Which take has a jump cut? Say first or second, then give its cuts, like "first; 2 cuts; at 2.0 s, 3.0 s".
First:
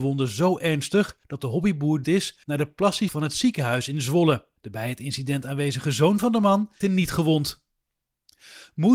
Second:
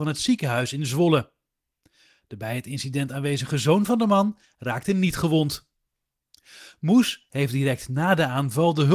first; 6 cuts; at 1.2 s, 2.0 s, 2.4 s, 3.1 s, 4.6 s, 6.8 s